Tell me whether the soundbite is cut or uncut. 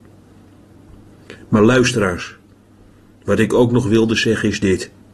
uncut